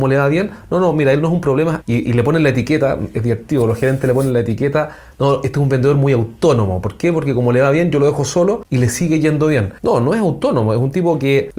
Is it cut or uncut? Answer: uncut